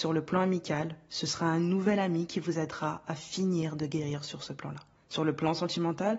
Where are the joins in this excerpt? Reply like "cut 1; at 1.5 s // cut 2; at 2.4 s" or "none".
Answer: none